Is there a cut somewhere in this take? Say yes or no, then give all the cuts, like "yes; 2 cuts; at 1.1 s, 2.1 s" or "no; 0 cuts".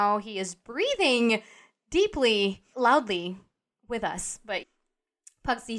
yes; 2 cuts; at 2.7 s, 4.6 s